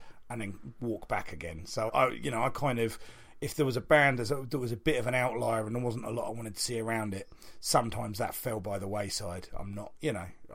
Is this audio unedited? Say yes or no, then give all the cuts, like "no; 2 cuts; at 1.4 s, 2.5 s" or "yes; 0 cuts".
no; 1 cut; at 1.9 s